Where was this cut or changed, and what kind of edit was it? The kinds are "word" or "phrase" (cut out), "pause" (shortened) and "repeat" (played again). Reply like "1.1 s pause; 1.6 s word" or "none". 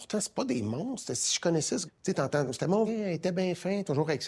1.9 s word; 2.9 s word